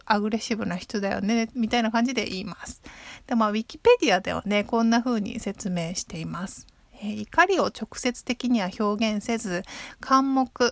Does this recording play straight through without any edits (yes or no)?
yes